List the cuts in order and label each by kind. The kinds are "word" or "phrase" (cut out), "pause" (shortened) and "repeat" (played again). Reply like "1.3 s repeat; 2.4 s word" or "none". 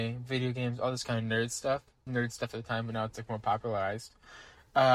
2.1 s word